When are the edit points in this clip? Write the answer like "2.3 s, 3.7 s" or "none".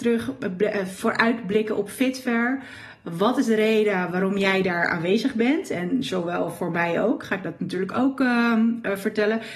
none

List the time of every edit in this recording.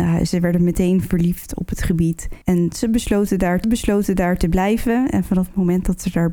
2.4 s, 3.6 s

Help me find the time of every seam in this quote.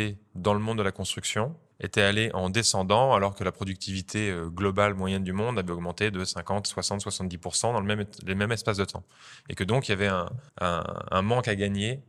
1.7 s, 10.5 s

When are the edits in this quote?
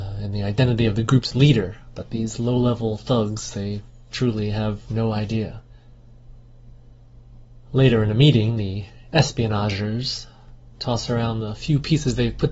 none

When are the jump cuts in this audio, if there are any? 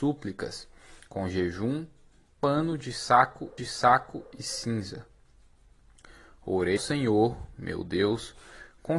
3.6 s, 6.8 s

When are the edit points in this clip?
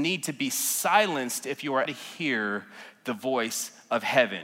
1.9 s

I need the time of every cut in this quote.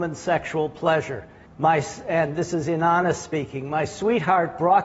1.5 s

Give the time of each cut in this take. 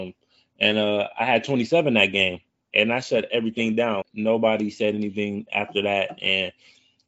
4.0 s

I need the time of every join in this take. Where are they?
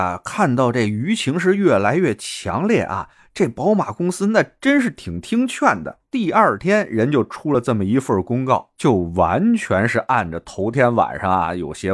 none

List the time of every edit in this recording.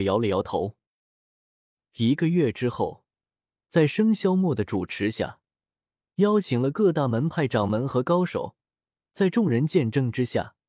none

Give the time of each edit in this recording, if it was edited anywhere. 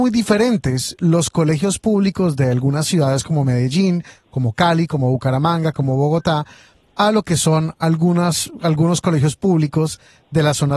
none

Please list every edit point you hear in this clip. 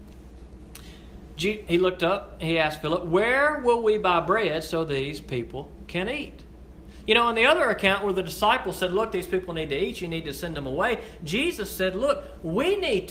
1.6 s

